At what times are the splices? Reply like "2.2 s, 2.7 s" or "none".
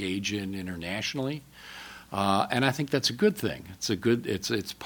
none